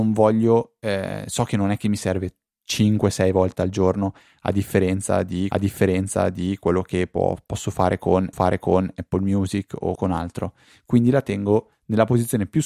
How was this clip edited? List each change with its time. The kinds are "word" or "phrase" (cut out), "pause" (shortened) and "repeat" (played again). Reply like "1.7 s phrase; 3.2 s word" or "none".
5.5 s repeat; 8.3 s repeat; 10.0 s phrase